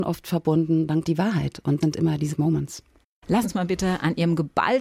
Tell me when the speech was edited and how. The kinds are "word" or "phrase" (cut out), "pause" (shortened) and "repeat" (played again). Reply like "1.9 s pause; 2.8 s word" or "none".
1.0 s word; 1.8 s word; 2.3 s word; 3.4 s word